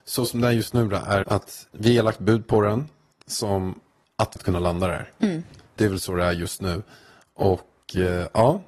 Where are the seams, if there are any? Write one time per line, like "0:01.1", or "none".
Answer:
0:01.2
0:01.7
0:03.2
0:04.4
0:05.8